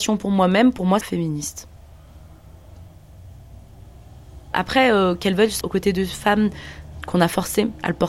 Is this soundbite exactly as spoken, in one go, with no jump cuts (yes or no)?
no